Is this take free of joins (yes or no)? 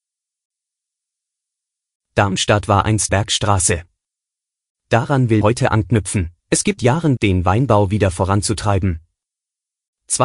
no